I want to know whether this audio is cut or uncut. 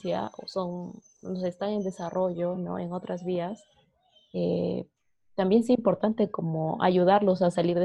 uncut